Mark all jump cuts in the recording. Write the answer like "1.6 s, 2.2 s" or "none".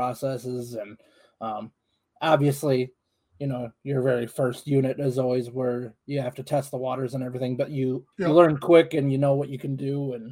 8.1 s